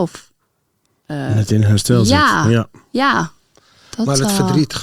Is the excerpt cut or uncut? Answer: uncut